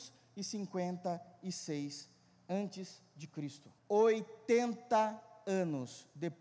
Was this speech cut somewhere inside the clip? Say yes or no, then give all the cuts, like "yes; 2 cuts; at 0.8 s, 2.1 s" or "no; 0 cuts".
yes; 1 cut; at 3.8 s